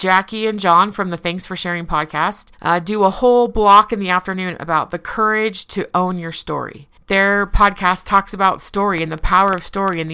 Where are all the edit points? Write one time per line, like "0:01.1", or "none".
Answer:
0:02.5
0:07.0